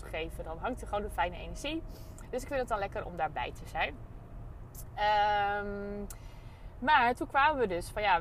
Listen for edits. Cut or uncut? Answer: uncut